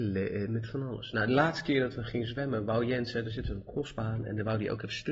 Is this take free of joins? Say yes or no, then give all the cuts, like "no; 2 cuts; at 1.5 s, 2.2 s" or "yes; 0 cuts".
yes; 0 cuts